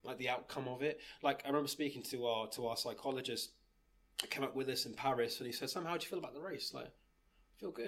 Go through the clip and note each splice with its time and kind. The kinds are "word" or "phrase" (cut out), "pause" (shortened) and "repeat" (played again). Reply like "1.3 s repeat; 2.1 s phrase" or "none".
none